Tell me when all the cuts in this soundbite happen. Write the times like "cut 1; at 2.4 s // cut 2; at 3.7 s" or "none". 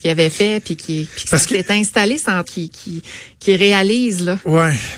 cut 1; at 2.4 s